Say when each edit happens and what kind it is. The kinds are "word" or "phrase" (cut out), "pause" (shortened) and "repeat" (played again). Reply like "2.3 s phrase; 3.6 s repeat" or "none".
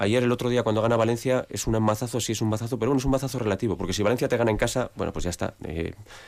none